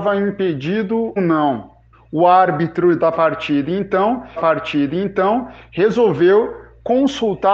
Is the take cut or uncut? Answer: cut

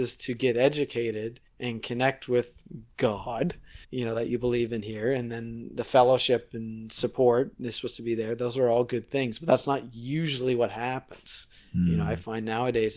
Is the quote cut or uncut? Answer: cut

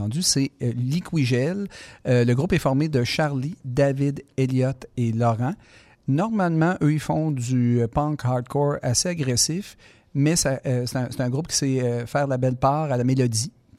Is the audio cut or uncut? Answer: uncut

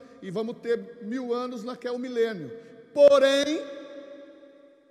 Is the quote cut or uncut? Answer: uncut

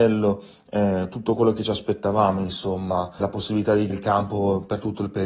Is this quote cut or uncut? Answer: cut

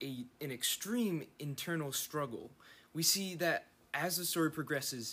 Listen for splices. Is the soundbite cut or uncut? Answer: uncut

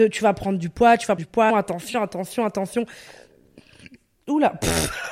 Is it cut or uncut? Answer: cut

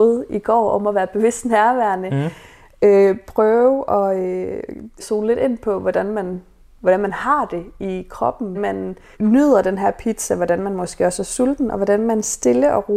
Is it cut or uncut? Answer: cut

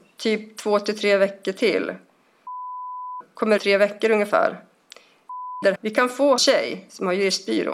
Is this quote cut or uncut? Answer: cut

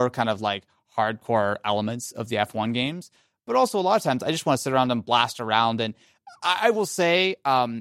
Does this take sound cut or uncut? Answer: uncut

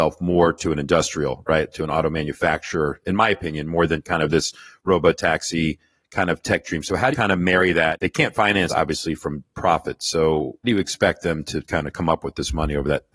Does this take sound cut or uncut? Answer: cut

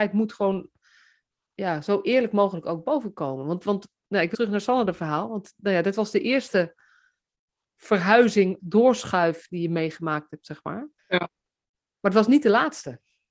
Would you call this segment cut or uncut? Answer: cut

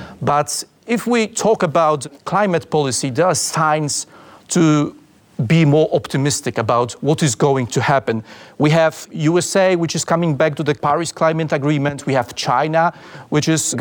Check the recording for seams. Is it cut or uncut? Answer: uncut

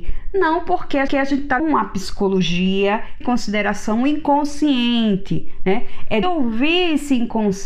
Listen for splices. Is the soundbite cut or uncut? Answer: cut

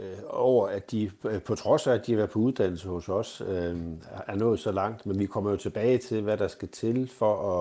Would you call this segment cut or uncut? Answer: uncut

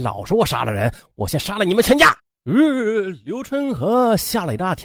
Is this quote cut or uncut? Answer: cut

